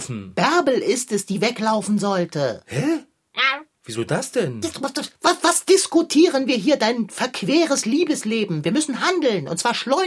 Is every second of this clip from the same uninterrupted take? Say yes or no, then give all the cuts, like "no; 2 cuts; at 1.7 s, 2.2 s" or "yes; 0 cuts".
yes; 0 cuts